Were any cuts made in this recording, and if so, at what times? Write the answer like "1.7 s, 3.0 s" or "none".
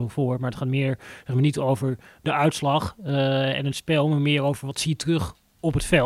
none